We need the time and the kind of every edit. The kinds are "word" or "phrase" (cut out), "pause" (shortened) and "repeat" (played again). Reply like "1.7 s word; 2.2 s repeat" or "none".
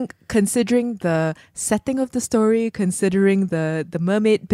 none